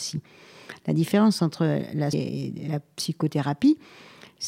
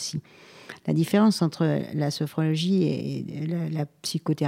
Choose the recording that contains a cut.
first; 2 cuts; at 2.1 s, 2.7 s

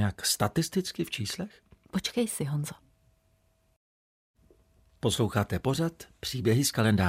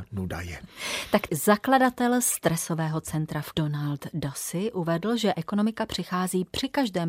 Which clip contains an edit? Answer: second; 3 cuts; at 1.3 s, 3.5 s, 5.3 s

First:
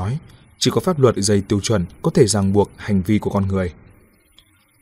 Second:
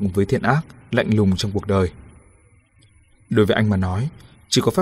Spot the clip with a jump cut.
first; 2 cuts; at 1.2 s, 1.9 s

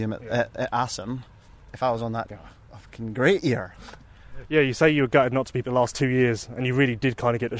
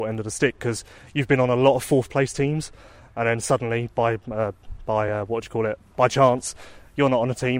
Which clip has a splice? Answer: first; 2 cuts; at 2.3 s, 5.6 s

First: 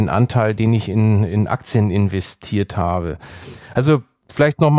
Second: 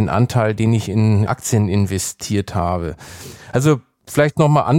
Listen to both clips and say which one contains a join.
second; 1 cut; at 1.3 s

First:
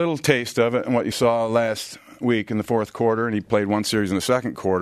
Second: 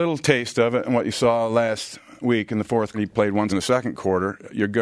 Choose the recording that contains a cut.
second; 2 cuts; at 2.9 s, 3.5 s

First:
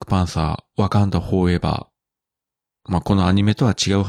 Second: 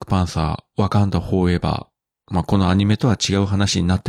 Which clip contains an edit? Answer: second; 1 cut; at 2.1 s

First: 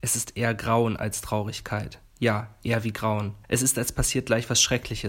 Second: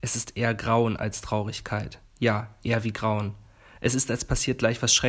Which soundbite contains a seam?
first; 1 cut; at 3.4 s

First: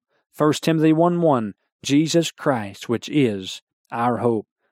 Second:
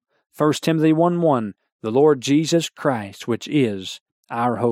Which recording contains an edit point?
first; 1 cut; at 1.8 s

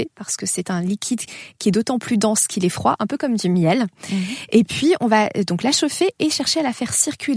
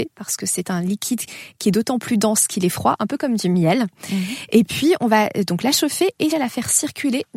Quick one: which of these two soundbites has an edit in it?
second; 1 cut; at 6.3 s

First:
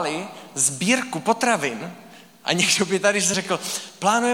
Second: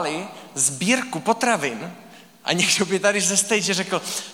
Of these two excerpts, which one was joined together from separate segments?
first; 1 cut; at 3.3 s

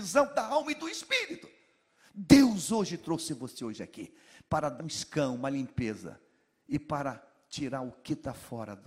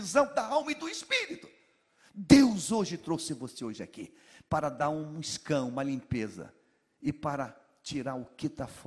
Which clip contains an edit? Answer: first; 1 cut; at 4.8 s

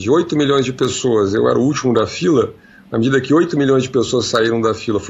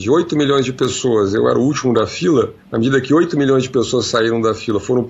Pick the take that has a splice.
second; 1 cut; at 2.6 s

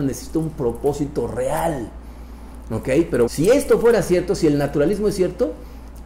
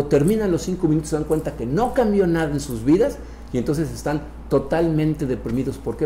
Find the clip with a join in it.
first; 1 cut; at 3.3 s

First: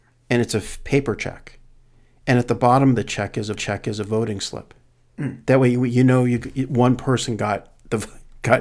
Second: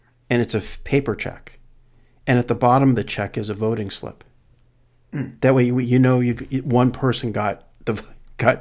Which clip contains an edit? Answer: first; 2 cuts; at 3.5 s, 4.9 s

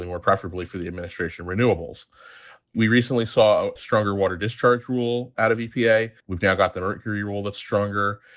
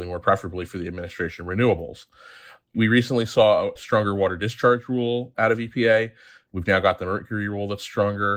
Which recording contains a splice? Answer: first; 1 cut; at 6.2 s

